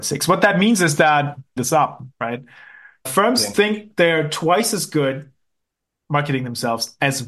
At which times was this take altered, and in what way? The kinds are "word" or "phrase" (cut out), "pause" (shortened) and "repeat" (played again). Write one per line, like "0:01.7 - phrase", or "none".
0:01.6 - word